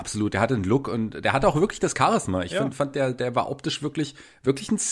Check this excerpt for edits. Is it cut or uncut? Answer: uncut